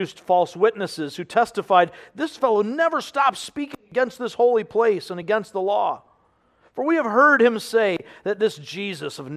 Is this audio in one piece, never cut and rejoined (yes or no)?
yes